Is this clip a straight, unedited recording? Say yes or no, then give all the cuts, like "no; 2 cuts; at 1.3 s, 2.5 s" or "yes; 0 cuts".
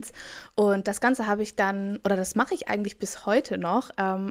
yes; 0 cuts